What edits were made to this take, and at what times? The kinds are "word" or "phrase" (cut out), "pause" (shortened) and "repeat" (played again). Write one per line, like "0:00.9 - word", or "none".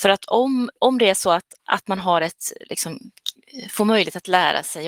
0:01.6 - pause